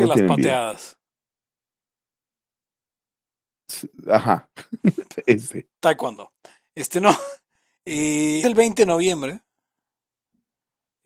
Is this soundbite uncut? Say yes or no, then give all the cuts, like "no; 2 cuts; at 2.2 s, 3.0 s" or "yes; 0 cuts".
no; 2 cuts; at 5.8 s, 8.4 s